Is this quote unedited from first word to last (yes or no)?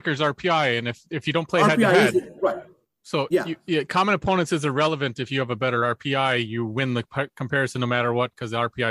yes